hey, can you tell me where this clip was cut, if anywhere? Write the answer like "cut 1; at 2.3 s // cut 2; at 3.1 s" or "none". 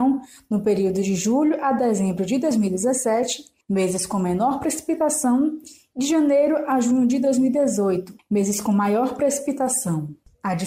none